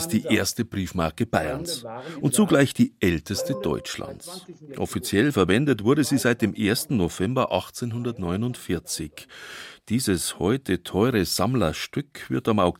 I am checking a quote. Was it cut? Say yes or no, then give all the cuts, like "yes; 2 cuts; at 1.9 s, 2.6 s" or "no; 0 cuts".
no; 0 cuts